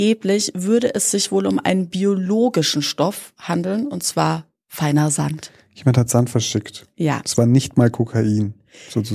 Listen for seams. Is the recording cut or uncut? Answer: uncut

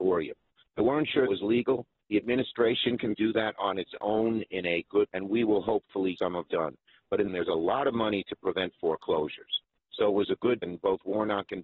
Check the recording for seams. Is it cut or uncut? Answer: cut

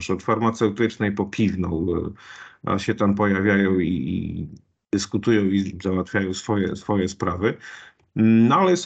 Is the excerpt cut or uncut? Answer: uncut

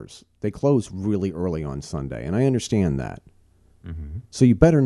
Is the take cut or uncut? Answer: uncut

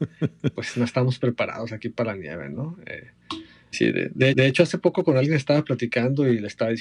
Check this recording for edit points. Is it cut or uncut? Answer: cut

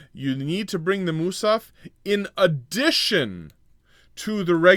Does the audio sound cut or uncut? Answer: uncut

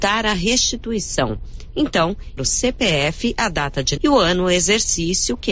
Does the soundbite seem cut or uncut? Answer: cut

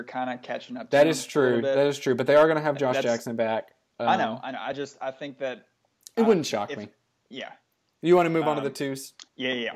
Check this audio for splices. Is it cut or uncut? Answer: uncut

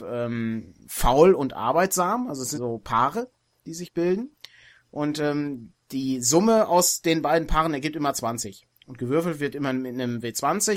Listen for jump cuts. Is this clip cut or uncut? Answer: cut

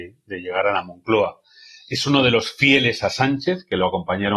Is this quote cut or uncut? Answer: uncut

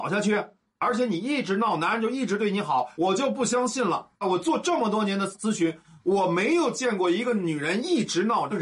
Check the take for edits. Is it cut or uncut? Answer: cut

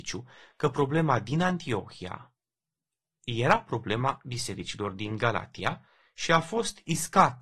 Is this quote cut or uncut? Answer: uncut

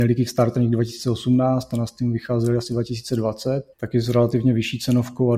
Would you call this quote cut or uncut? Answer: cut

